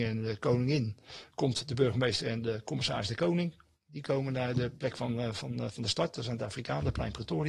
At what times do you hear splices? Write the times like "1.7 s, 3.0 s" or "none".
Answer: none